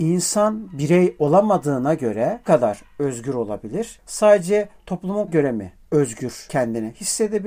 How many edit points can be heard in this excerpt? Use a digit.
2